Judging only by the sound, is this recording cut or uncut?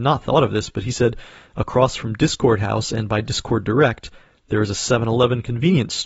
uncut